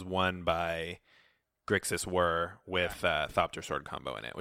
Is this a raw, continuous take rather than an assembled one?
yes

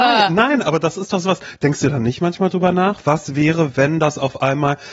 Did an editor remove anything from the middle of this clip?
no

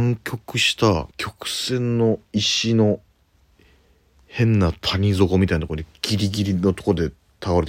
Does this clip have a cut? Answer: yes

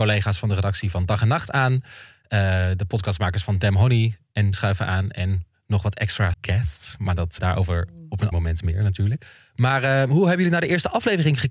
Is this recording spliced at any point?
yes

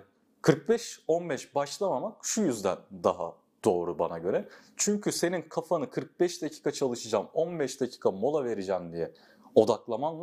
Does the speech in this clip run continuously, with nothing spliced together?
yes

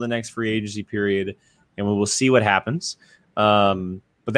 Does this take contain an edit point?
no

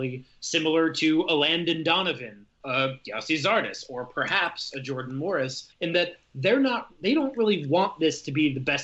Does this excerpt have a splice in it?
yes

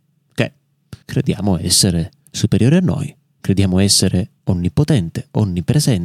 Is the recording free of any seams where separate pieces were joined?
no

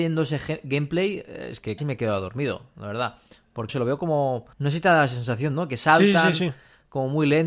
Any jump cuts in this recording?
yes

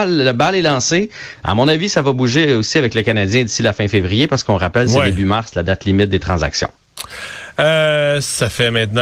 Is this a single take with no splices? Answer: yes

